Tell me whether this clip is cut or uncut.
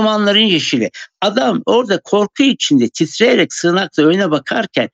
uncut